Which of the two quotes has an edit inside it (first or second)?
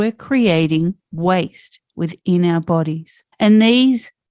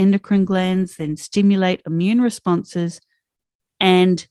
first